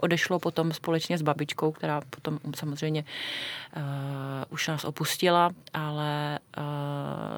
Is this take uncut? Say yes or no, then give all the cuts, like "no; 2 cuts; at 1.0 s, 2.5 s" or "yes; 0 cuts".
no; 1 cut; at 5.6 s